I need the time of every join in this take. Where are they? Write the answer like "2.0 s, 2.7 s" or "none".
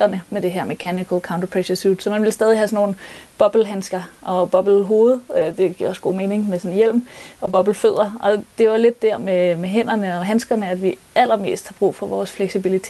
none